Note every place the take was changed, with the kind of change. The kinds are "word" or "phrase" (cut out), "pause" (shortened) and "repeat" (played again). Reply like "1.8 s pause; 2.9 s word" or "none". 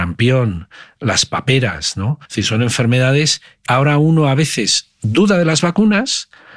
2.3 s pause; 3.7 s word